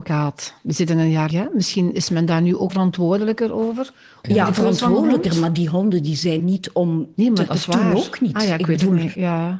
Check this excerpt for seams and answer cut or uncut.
cut